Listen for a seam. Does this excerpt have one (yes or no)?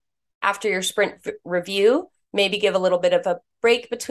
yes